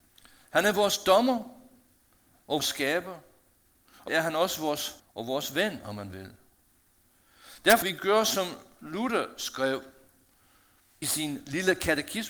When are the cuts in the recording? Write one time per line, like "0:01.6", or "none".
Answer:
0:02.6
0:04.1
0:05.0
0:07.8
0:11.0